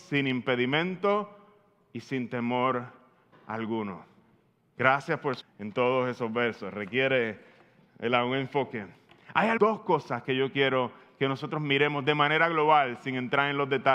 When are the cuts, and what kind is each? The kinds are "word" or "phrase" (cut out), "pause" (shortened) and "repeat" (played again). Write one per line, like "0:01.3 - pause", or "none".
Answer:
0:05.4 - word
0:09.6 - word